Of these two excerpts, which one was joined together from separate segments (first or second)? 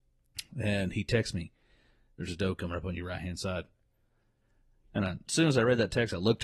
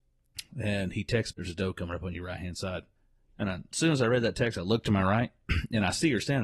second